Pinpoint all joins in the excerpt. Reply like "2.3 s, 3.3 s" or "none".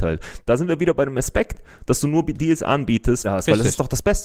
3.2 s